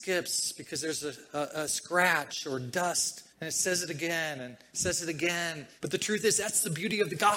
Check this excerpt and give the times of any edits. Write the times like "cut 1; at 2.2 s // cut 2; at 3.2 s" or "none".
cut 1; at 3.3 s // cut 2; at 5.8 s